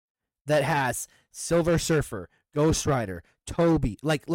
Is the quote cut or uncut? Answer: uncut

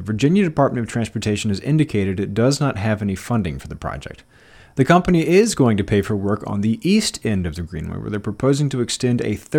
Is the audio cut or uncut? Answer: uncut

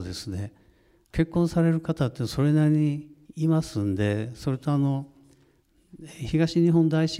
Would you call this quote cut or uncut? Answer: cut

